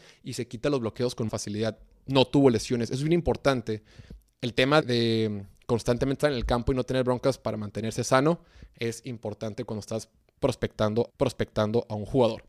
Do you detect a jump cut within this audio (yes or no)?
yes